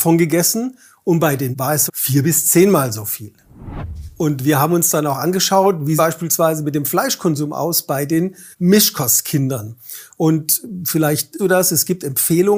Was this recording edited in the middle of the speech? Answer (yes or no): yes